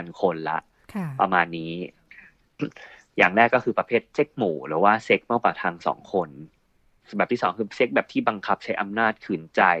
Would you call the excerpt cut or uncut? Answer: uncut